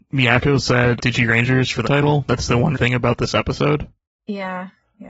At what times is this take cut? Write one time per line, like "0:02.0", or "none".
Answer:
0:01.0
0:01.8
0:02.7